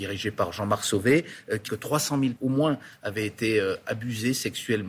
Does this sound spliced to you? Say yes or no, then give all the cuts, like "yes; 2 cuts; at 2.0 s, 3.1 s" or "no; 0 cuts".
yes; 2 cuts; at 1.7 s, 2.4 s